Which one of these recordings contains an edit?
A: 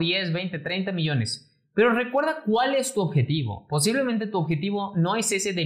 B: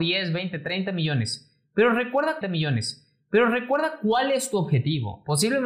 B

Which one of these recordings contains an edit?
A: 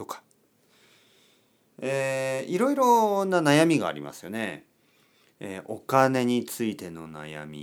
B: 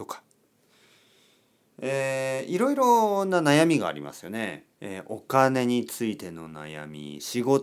B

